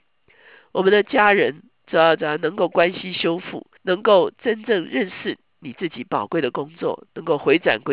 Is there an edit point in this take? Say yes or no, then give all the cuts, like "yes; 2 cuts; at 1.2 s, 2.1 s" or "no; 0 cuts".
yes; 1 cut; at 3.8 s